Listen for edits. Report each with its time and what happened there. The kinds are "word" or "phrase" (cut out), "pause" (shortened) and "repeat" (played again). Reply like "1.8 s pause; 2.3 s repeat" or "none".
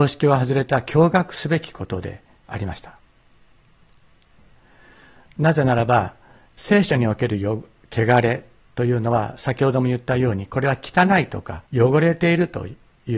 11.7 s pause